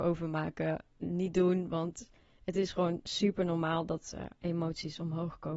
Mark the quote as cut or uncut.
uncut